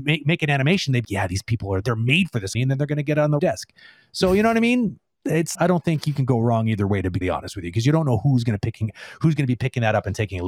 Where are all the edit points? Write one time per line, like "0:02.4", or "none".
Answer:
0:01.0
0:01.8
0:02.5
0:03.4
0:05.5
0:07.2